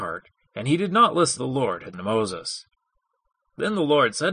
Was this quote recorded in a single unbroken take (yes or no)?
no